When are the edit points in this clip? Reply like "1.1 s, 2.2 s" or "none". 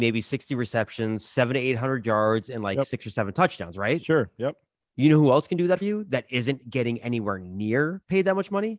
5.8 s